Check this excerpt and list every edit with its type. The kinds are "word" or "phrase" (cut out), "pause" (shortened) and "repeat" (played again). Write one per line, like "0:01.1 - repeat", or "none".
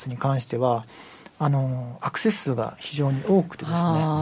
none